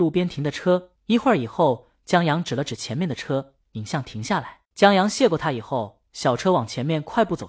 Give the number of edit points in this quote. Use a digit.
3